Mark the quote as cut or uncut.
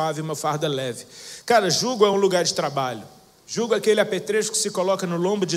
uncut